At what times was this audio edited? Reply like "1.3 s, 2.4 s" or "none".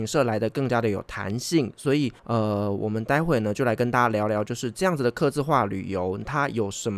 2.2 s